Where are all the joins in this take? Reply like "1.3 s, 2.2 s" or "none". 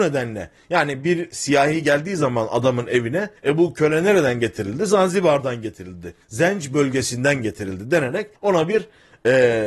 3.4 s, 6.2 s, 8.4 s